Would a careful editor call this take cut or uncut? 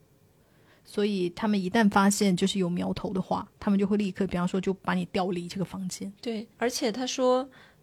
cut